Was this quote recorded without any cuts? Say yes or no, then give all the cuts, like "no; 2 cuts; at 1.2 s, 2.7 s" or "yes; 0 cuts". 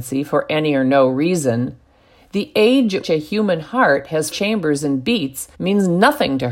no; 3 cuts; at 3.0 s, 4.3 s, 5.5 s